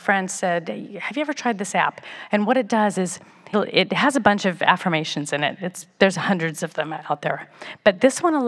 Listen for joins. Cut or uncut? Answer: cut